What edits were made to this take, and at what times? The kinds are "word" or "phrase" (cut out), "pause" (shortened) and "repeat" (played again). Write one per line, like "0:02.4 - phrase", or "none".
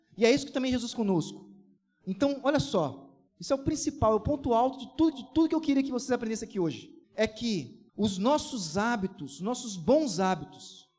0:00.9 - word
0:01.8 - pause
0:03.3 - pause
0:05.1 - repeat
0:07.0 - pause
0:07.9 - pause